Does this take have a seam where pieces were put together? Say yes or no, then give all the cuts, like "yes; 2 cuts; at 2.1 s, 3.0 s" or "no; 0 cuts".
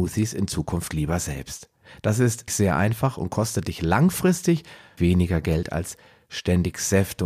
yes; 2 cuts; at 2.5 s, 5.0 s